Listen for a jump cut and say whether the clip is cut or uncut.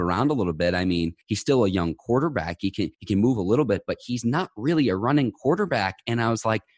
cut